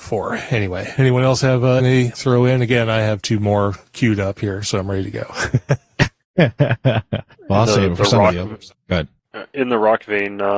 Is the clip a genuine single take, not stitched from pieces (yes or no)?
no